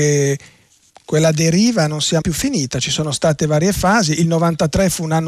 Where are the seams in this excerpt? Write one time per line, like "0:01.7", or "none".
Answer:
0:02.2